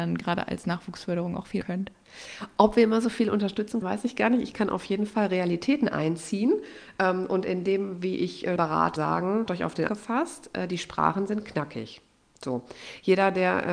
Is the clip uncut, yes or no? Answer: no